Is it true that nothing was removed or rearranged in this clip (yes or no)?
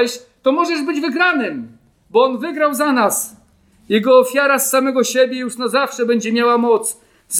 yes